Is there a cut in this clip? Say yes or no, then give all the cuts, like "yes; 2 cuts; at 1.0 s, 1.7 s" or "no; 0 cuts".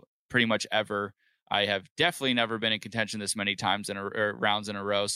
no; 0 cuts